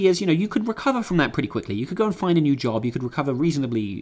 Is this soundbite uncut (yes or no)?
yes